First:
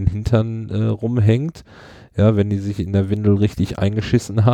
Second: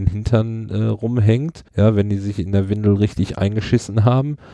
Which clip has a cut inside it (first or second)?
second